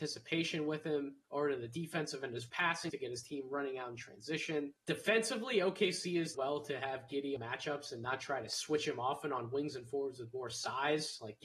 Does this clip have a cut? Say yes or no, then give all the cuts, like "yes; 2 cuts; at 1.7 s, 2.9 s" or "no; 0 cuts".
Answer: yes; 6 cuts; at 1.2 s, 2.5 s, 2.9 s, 4.8 s, 6.3 s, 7.4 s